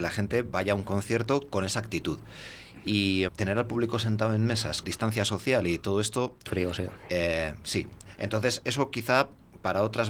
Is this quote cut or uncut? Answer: cut